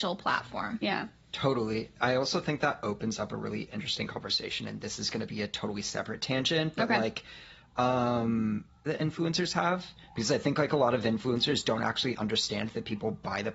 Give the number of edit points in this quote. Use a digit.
1